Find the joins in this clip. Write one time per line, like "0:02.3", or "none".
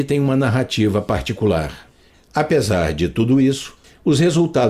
none